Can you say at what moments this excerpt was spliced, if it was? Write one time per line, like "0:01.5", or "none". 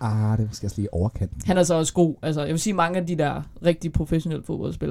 none